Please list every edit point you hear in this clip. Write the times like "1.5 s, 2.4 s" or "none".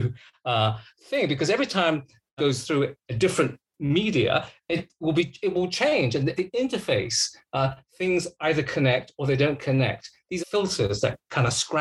2.4 s, 6.4 s, 10.4 s